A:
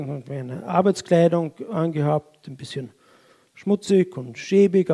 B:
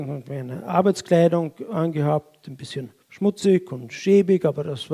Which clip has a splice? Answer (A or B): B